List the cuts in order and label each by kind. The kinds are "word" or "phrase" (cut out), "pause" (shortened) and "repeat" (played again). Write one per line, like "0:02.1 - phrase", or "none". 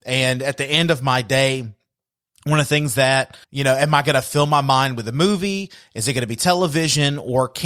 0:03.4 - pause